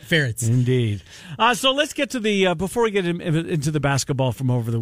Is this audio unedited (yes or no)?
yes